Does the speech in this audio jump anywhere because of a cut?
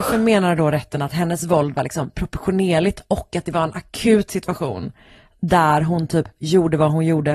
no; 0 cuts

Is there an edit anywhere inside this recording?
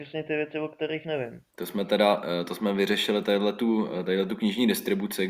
no; 0 cuts

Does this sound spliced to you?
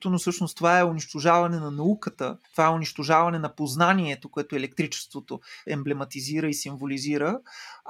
yes; 2 cuts; at 2.4 s, 5.7 s

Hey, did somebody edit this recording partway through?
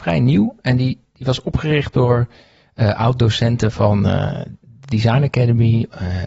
no; 0 cuts

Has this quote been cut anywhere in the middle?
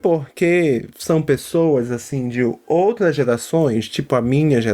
no; 0 cuts

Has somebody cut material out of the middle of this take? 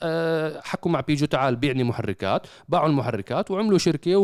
no; 0 cuts

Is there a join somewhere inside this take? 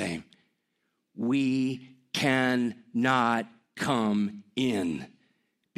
no; 0 cuts

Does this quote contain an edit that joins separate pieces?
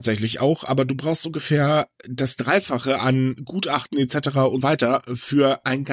yes; 1 cut; at 4.6 s

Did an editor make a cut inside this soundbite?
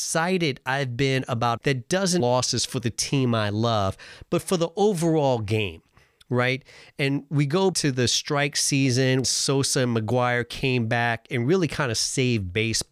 yes; 4 cuts; at 1.6 s, 2.2 s, 7.7 s, 9.2 s

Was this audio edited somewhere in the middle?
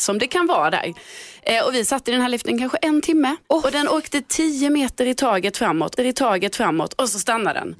yes; 2 cuts; at 3.4 s, 6.0 s

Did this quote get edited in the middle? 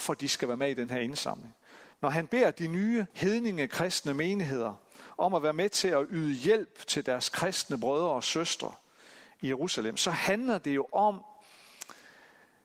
yes; 2 cuts; at 1.9 s, 3.1 s

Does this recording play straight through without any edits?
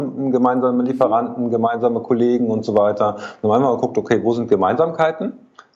yes; 0 cuts

